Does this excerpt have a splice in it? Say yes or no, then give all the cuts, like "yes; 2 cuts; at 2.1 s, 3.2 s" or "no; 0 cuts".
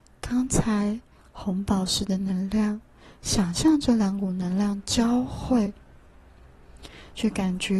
no; 0 cuts